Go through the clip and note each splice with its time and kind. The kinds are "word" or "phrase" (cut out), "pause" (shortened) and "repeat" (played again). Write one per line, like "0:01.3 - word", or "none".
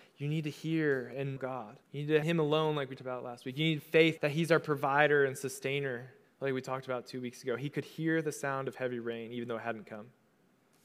0:01.4 - word
0:01.8 - pause
0:02.2 - phrase
0:03.0 - word
0:04.2 - word
0:06.2 - pause